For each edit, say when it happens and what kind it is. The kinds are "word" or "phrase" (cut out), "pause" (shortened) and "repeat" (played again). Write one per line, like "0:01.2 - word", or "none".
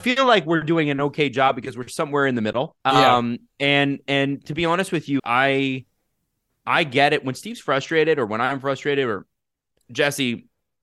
0:02.8 - pause
0:05.2 - word

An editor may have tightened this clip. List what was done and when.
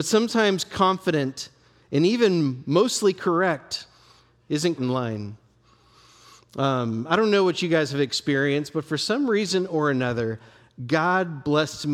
0:04.8 - word

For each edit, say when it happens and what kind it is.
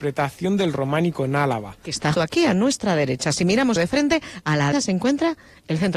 0:02.1 - word
0:03.8 - phrase
0:04.7 - word

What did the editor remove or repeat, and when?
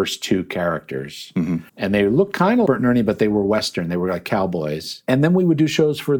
0:01.7 - pause
0:02.7 - word

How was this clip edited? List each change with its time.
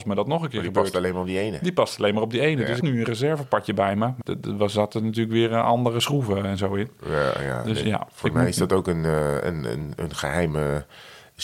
0:02.8 - phrase
0:04.2 - phrase

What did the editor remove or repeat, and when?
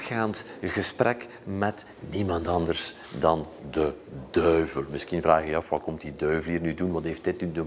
none

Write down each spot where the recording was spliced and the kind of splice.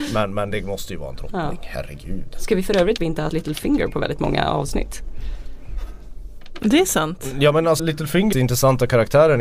0:03.0 - phrase
0:03.3 - word
0:07.8 - word
0:08.3 - phrase

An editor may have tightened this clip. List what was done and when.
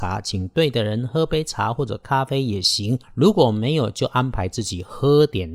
0:03.0 - pause

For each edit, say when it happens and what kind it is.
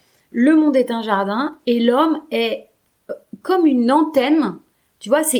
none

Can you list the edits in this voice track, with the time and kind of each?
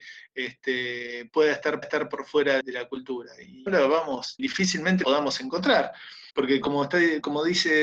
0:01.8 - repeat
0:02.6 - word
0:03.7 - word
0:04.4 - word
0:05.0 - word
0:06.3 - pause

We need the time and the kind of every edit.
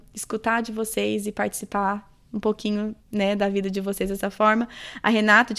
0:03.0 - pause

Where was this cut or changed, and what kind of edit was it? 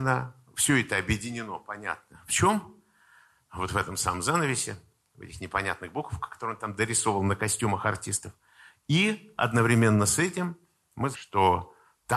0:11.1 - word

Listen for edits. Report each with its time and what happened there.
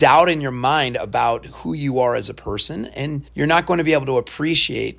0:03.3 - pause

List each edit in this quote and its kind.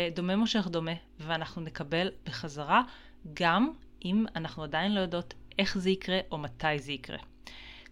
none

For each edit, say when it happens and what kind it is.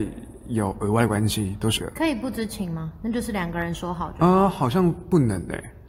0:01.8 - word

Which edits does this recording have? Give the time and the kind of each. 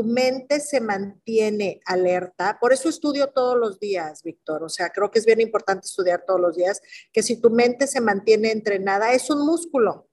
none

